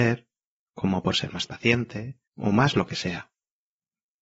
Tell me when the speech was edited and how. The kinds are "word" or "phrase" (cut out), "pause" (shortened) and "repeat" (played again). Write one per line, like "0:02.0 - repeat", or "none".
0:01.1 - word
0:01.5 - phrase
0:02.3 - pause